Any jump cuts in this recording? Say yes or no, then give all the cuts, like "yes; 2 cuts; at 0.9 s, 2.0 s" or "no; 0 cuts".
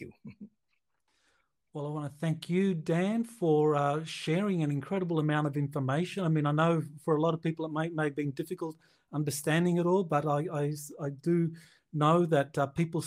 no; 0 cuts